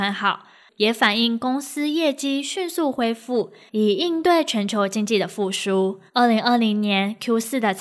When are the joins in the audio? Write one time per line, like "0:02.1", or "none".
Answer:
0:06.1

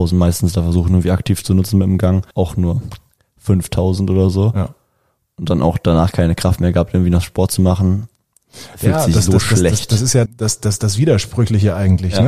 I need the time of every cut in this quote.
0:02.3
0:10.3

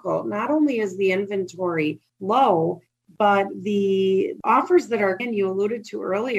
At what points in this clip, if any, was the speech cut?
0:02.1
0:05.2

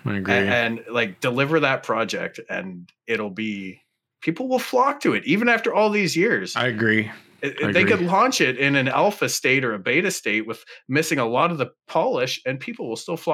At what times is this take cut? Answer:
none

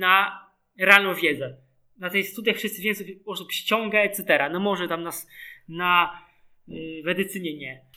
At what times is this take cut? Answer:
none

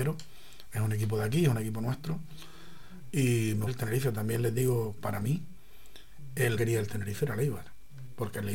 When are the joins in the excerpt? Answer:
0:03.7
0:05.0
0:06.6

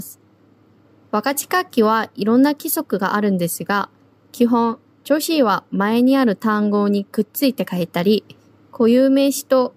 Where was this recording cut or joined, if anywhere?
none

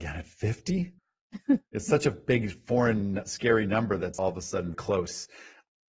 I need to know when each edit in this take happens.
0:01.0
0:04.2
0:04.7

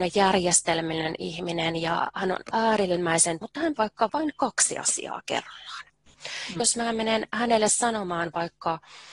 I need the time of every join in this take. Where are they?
0:03.4
0:03.8
0:04.1
0:06.6

